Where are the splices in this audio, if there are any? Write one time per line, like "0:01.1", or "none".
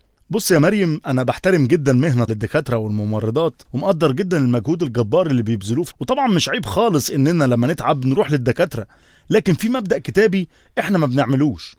0:02.3
0:03.6
0:05.9

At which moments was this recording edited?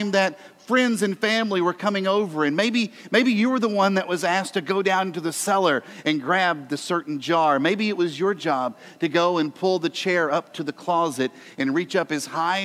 none

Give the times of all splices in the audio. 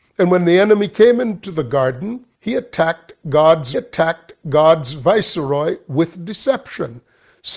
0:02.3
0:03.7

